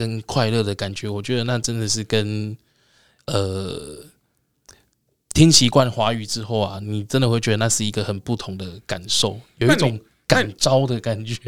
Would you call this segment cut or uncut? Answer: uncut